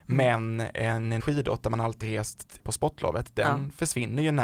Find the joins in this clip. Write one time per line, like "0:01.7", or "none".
0:01.2
0:02.0
0:02.6